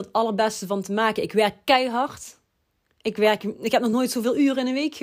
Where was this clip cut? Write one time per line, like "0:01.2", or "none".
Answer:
none